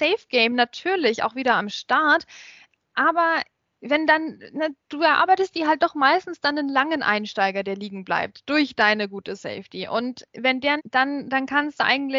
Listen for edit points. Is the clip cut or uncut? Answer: cut